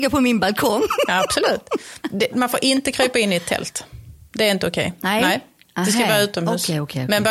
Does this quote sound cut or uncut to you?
cut